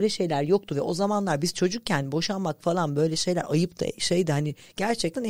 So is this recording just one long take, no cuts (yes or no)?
yes